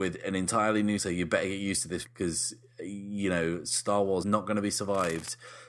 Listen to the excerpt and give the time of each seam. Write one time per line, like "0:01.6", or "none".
0:01.0
0:02.0
0:04.2